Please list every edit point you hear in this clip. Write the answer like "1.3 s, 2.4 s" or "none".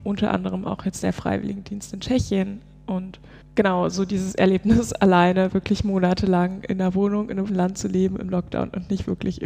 3.4 s, 7.5 s